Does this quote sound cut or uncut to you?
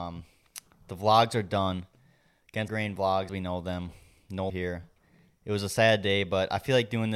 cut